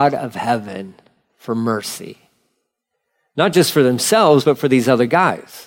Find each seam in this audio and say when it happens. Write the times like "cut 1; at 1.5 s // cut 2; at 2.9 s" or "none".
none